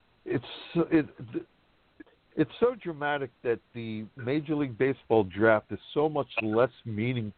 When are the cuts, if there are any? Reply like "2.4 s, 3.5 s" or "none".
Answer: none